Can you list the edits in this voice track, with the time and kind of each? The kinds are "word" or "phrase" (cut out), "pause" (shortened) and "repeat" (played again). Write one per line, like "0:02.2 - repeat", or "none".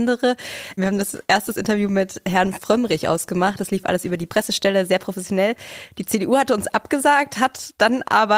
none